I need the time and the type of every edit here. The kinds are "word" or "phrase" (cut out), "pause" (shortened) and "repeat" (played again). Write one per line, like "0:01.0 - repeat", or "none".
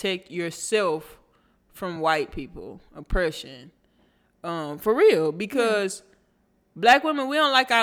none